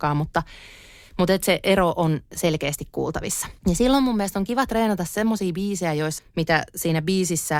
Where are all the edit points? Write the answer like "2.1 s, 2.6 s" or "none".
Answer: 3.6 s, 6.2 s